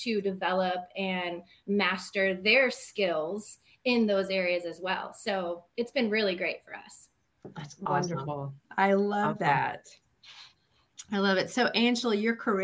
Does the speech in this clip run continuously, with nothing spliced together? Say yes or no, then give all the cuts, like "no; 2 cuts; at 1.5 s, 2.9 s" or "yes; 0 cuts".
yes; 0 cuts